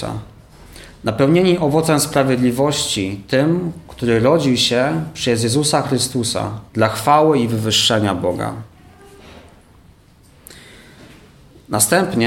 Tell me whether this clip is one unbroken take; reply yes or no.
no